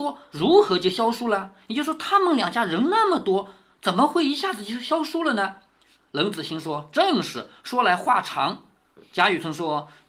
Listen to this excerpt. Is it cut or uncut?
uncut